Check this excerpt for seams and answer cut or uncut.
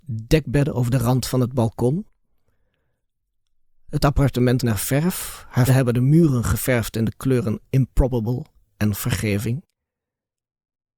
cut